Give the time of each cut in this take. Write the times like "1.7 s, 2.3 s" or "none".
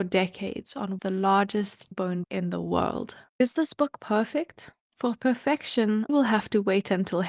1.0 s, 1.9 s, 2.2 s, 3.3 s, 4.8 s, 6.1 s